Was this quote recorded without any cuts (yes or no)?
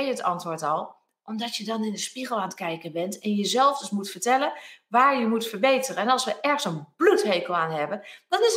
yes